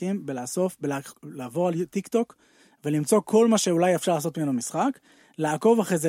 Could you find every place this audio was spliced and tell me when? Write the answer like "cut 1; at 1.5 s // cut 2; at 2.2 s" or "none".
none